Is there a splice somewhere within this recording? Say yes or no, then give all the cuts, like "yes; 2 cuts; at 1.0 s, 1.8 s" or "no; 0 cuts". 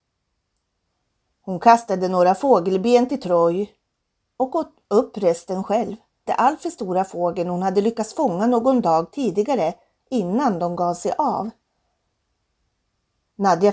yes; 1 cut; at 6.3 s